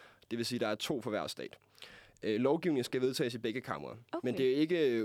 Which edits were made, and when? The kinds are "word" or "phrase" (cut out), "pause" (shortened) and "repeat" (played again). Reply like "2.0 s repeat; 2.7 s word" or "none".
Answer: 4.1 s pause

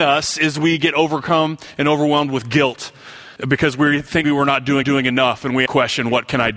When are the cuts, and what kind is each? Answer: 3.4 s pause; 4.2 s word; 4.8 s repeat; 5.7 s phrase

